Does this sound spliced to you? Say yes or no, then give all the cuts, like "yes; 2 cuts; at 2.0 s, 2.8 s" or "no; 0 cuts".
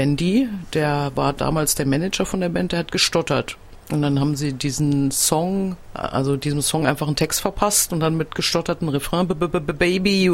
no; 0 cuts